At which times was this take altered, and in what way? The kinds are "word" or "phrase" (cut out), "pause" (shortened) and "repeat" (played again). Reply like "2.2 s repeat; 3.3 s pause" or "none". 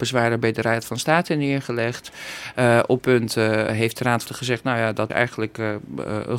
3.0 s word; 3.7 s word; 4.3 s word; 5.1 s word